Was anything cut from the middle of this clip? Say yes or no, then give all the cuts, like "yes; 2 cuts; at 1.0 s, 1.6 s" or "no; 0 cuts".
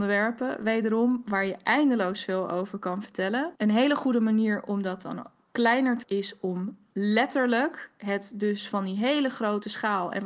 yes; 2 cuts; at 3.6 s, 6.0 s